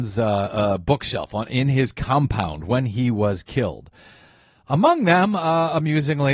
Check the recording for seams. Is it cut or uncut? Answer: uncut